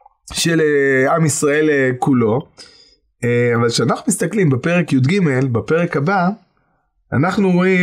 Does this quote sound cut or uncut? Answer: uncut